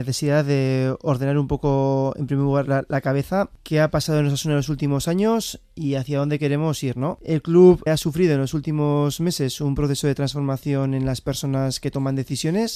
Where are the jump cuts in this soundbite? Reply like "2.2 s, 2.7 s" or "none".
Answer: 7.9 s